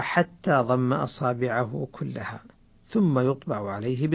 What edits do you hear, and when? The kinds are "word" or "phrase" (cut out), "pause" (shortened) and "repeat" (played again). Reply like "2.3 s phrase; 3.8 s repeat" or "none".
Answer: none